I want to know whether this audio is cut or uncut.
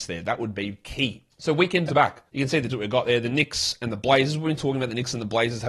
cut